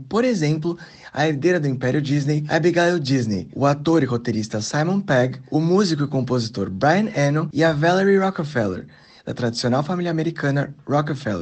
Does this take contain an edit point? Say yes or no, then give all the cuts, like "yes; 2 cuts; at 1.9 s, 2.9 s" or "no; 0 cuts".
no; 0 cuts